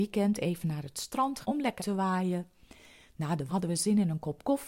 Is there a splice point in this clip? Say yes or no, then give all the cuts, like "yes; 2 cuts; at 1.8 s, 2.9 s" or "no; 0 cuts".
yes; 3 cuts; at 1.4 s, 1.8 s, 3.5 s